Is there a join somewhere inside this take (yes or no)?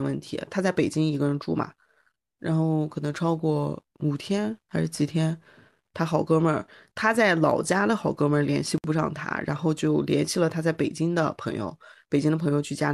yes